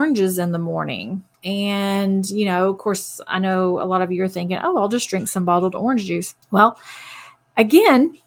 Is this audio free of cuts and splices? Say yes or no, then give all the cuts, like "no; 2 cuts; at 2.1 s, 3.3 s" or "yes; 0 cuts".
no; 2 cuts; at 1.3 s, 6.4 s